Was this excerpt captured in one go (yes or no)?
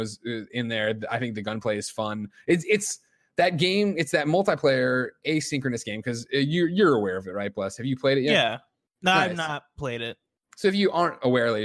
yes